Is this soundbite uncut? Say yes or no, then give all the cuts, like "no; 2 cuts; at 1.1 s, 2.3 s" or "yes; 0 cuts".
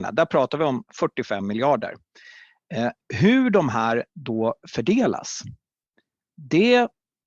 no; 1 cut; at 4.1 s